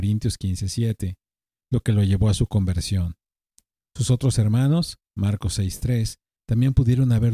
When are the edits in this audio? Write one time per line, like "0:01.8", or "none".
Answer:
none